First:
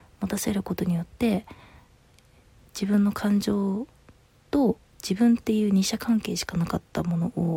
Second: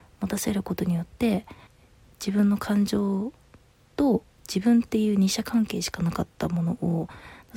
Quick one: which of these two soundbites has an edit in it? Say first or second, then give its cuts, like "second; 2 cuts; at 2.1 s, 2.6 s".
second; 1 cut; at 1.7 s